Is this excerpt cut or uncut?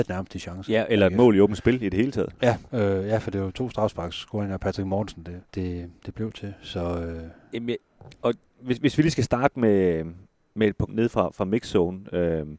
cut